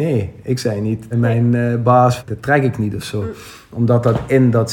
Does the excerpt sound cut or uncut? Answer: cut